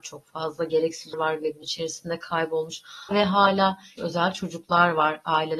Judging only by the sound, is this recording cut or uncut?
cut